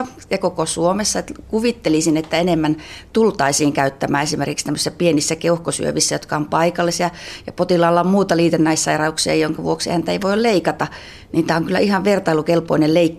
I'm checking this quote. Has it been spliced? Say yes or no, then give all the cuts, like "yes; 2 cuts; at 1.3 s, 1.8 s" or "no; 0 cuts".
no; 0 cuts